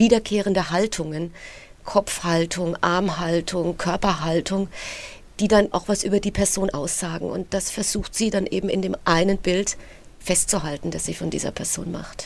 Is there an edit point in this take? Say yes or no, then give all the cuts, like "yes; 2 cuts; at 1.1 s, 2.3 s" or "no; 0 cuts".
yes; 1 cut; at 5.7 s